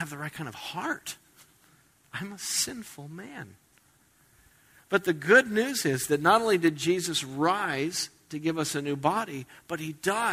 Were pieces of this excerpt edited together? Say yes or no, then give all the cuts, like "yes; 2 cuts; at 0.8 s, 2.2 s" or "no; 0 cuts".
no; 0 cuts